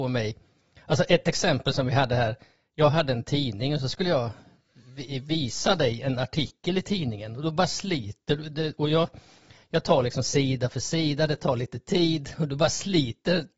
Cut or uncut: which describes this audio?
uncut